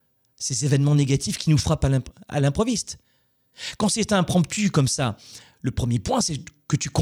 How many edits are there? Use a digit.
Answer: 0